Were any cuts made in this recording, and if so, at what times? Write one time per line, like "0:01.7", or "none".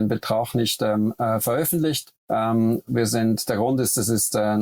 0:02.2

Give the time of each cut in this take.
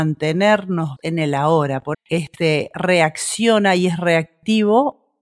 0:01.0
0:01.9

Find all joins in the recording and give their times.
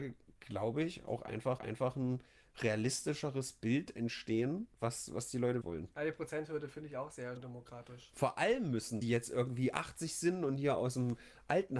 0:01.6
0:04.7
0:05.6
0:07.4
0:09.0

